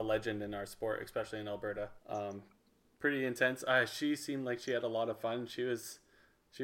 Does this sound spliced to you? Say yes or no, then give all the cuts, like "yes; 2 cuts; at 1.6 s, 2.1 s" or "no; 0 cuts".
yes; 1 cut; at 2.0 s